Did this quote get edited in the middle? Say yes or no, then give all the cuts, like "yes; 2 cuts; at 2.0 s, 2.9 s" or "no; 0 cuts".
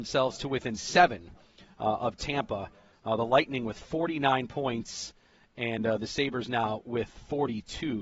no; 0 cuts